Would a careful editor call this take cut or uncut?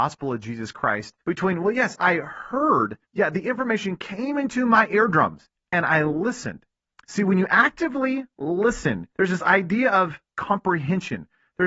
cut